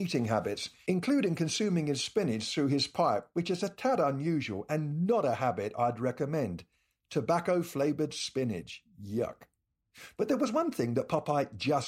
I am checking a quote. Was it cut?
no; 0 cuts

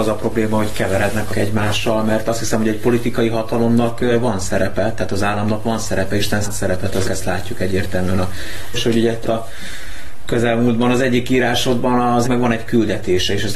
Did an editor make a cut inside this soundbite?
yes; 6 cuts; at 1.3 s, 6.4 s, 7.0 s, 8.7 s, 9.2 s, 12.2 s

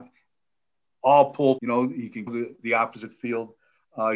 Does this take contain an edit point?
yes; 3 cuts; at 1.6 s, 2.3 s, 2.6 s

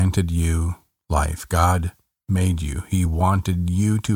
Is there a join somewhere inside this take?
no; 0 cuts

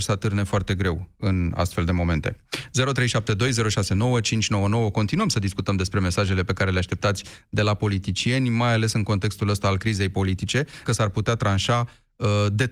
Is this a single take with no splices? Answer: no; 1 cut; at 10.9 s

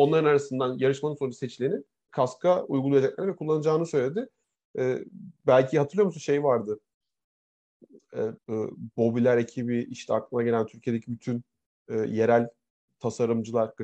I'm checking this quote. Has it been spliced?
yes; 2 cuts; at 2.1 s, 8.4 s

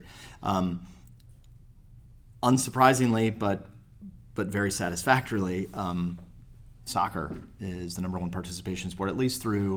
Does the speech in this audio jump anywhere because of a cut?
no; 0 cuts

